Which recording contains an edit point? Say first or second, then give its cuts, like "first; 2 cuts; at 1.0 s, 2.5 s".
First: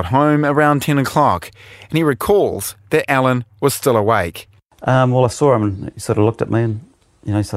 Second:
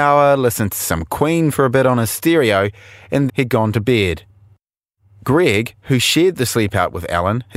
second; 1 cut; at 3.3 s